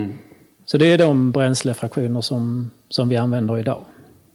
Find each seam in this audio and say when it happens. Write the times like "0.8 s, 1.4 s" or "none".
none